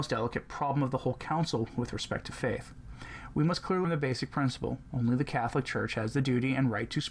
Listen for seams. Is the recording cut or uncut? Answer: cut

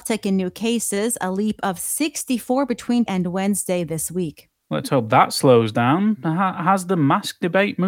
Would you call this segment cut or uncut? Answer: cut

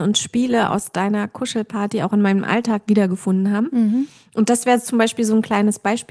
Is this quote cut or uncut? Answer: uncut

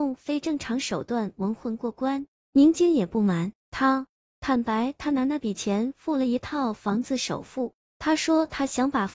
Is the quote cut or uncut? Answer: cut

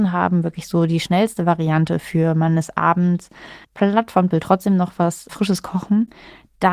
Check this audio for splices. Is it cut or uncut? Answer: cut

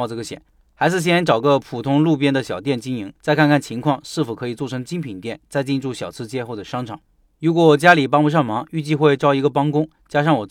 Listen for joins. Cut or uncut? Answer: cut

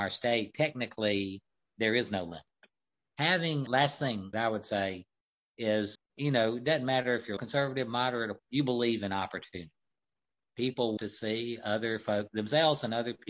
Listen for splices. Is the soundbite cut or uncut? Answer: cut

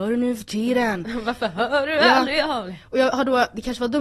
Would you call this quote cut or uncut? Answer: uncut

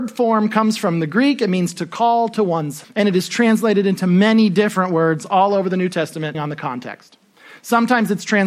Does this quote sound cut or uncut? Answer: cut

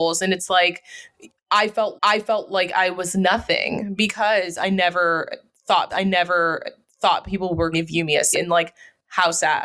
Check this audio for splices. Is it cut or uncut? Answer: cut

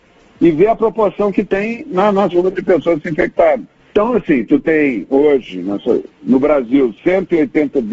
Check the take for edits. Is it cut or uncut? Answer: cut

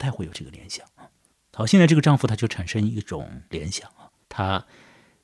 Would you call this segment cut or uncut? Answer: cut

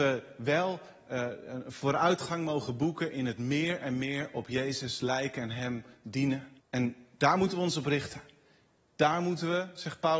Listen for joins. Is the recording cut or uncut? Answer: cut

